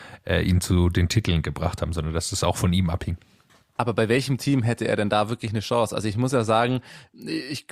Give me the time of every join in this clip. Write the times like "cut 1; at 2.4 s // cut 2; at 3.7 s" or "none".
none